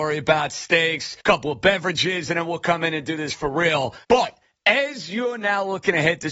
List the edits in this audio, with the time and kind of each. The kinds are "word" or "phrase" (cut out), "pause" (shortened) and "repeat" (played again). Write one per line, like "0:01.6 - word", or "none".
0:01.2 - pause
0:04.0 - pause